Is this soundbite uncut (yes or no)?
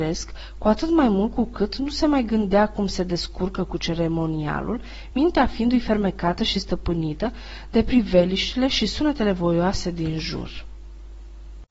yes